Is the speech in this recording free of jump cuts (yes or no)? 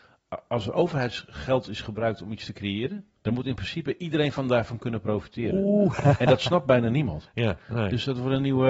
no